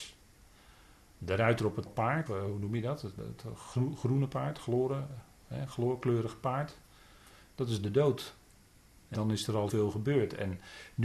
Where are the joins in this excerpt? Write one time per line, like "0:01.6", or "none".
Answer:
0:01.9
0:02.3
0:03.2
0:09.1
0:09.7